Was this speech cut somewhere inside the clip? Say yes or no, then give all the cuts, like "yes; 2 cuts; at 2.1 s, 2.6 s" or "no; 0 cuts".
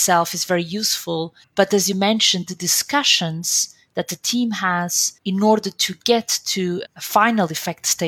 yes; 3 cuts; at 1.4 s, 5.2 s, 6.9 s